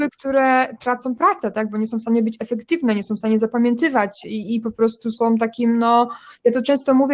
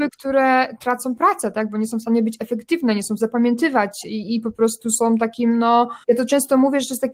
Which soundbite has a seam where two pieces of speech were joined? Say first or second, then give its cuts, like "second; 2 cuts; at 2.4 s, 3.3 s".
second; 2 cuts; at 3.2 s, 6.0 s